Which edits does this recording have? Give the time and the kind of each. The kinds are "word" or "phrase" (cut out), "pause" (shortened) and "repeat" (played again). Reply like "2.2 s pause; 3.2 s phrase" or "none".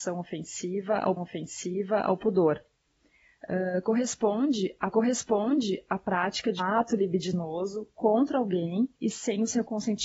1.2 s repeat; 4.9 s repeat; 6.6 s word; 8.9 s pause